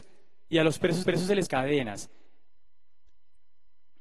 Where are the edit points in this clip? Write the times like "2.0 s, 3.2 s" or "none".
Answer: 1.0 s, 1.5 s